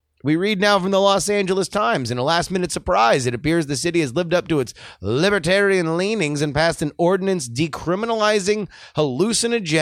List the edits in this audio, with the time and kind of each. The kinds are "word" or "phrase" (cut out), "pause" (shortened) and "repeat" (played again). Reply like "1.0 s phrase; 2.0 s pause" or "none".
none